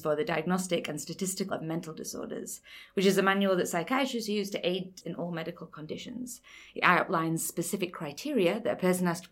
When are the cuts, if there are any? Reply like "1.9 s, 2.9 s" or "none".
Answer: 1.5 s, 5.0 s